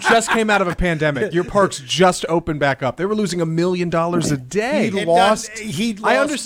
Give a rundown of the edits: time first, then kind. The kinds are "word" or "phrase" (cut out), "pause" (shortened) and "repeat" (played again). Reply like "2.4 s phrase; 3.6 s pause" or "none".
none